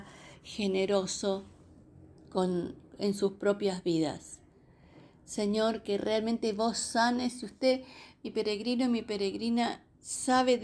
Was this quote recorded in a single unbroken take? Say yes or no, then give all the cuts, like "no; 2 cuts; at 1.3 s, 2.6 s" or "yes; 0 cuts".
yes; 0 cuts